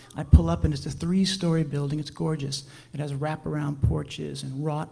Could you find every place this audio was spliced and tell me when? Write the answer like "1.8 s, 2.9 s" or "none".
none

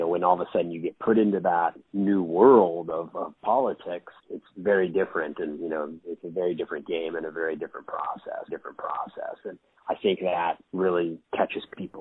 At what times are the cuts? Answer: 4.2 s, 8.5 s

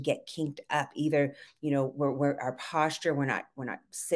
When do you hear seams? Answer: none

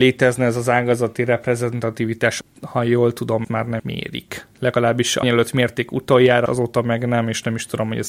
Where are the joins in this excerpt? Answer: 2.4 s, 3.4 s, 3.8 s, 5.2 s, 6.5 s

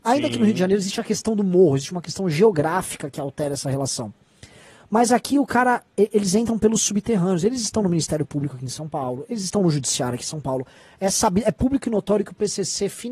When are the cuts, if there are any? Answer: none

